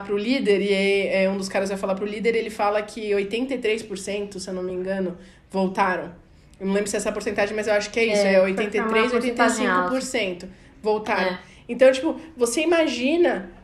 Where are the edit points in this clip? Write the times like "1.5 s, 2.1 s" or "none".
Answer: none